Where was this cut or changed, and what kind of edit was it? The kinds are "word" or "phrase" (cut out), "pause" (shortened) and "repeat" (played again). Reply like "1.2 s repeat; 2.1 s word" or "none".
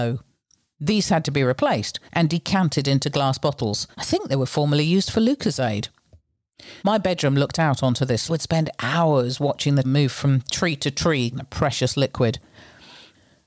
2.1 s pause; 3.9 s pause; 6.8 s pause; 8.3 s phrase; 9.8 s word; 11.3 s word

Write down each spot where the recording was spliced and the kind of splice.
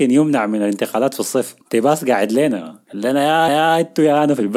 1.6 s pause; 2.8 s pause; 3.5 s repeat

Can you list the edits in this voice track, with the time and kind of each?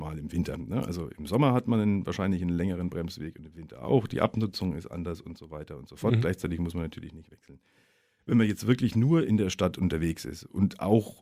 none

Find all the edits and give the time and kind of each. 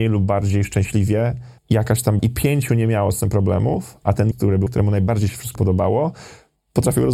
1.6 s pause; 2.2 s word; 4.3 s word; 4.7 s word; 5.5 s word

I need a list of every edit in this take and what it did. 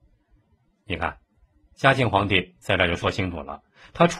none

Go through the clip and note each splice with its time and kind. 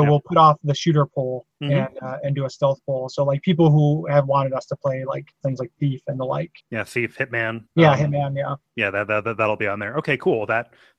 1.5 s pause; 5.3 s pause; 6.6 s pause; 7.7 s pause; 8.7 s pause

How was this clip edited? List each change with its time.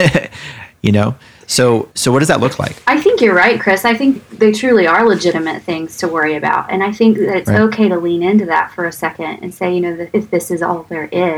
1.9 s pause; 2.8 s pause; 4.2 s word

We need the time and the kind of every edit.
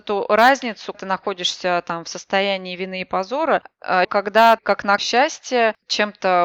0.9 s word; 4.0 s word; 4.6 s word; 5.0 s word

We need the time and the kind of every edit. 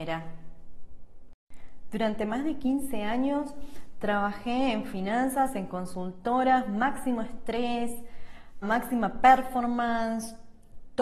8.6 s word

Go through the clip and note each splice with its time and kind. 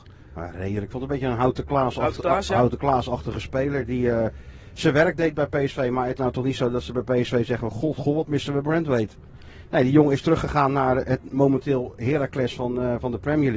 6.2 s word

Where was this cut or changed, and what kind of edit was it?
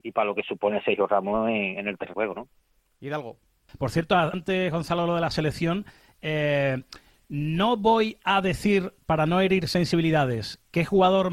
2.1 s word; 4.3 s phrase

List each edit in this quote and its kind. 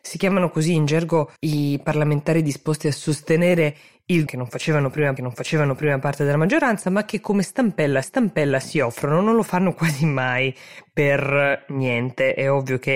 1.4 s pause; 4.3 s word; 5.2 s repeat; 8.0 s repeat

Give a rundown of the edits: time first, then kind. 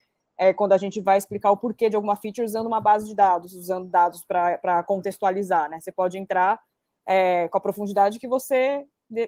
none

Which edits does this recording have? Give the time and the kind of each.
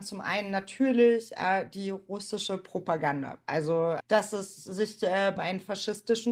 4.0 s word; 5.4 s phrase

